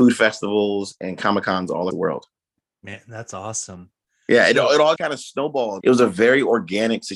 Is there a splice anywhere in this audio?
yes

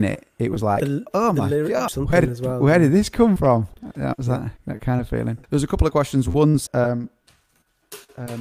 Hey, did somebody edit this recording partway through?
yes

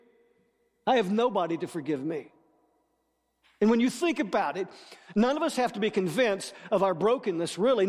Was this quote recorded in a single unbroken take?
yes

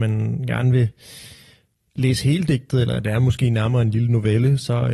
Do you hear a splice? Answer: no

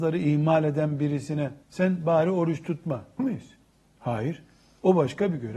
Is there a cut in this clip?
yes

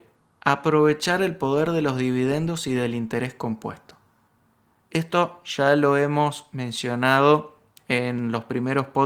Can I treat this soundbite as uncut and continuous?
yes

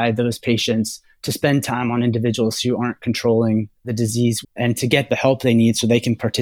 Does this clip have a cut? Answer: yes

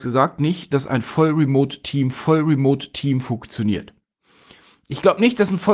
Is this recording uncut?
no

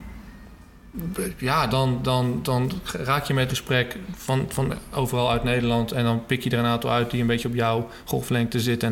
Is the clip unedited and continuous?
no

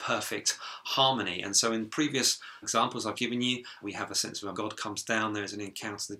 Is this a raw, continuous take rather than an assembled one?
no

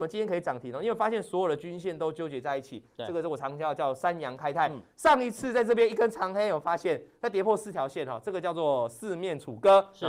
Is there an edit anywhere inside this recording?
no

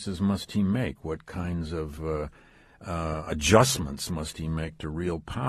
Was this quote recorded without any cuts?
yes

